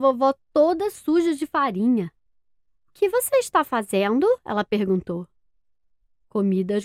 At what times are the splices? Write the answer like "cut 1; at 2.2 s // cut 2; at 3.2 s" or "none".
none